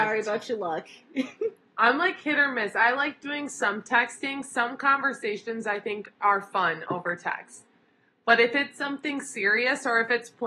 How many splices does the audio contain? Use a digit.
0